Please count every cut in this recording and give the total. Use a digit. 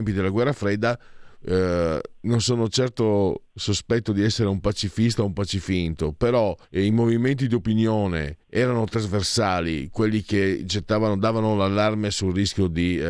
2